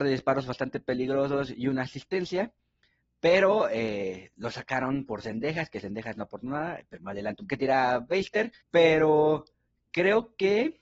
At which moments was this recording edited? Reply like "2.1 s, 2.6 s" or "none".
7.0 s, 7.5 s, 8.6 s